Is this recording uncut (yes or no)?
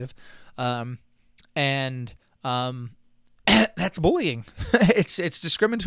no